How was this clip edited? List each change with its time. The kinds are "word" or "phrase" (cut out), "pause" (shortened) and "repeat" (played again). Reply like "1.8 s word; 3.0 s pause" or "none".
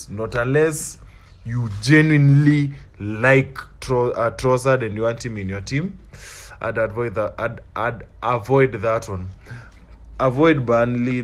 none